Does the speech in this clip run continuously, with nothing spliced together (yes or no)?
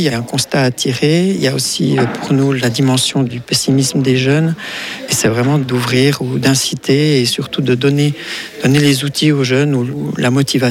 yes